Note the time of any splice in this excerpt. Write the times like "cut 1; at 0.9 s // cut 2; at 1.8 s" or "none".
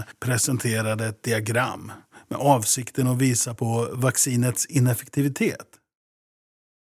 none

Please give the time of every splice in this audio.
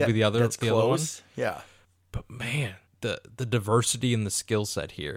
cut 1; at 1.8 s // cut 2; at 2.9 s

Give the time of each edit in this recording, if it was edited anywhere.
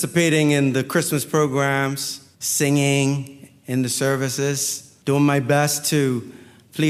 cut 1; at 2.3 s // cut 2; at 5.0 s

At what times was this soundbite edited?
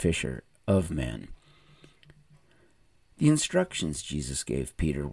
none

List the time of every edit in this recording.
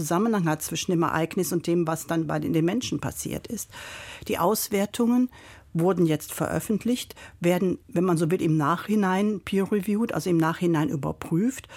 cut 1; at 7.8 s

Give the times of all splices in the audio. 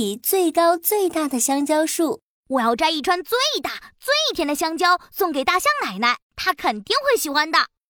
cut 1; at 6.2 s

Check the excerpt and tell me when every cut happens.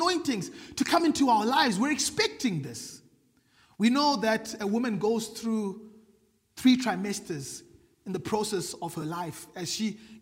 none

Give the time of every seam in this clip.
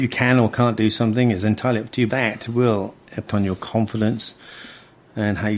cut 1; at 2.1 s // cut 2; at 3.3 s

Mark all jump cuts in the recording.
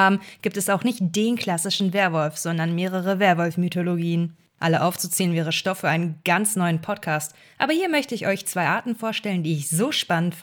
none

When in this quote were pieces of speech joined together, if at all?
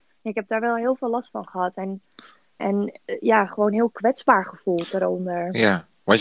cut 1; at 2.6 s

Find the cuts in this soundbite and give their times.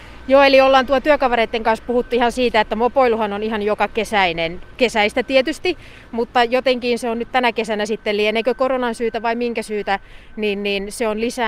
none

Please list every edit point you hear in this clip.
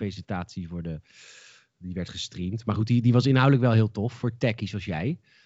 none

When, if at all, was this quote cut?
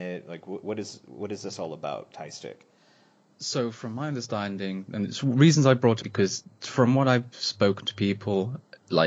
cut 1; at 6.0 s

